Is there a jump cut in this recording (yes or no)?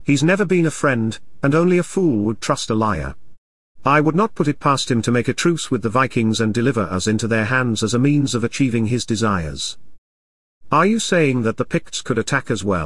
no